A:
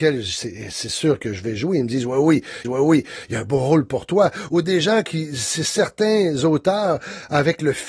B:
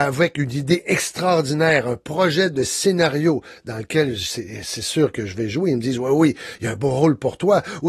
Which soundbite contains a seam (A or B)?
A